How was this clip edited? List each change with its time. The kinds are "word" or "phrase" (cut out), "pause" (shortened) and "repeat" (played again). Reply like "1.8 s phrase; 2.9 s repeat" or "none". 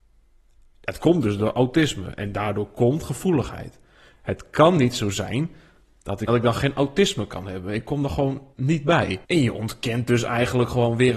6.3 s phrase; 8.5 s pause; 9.2 s pause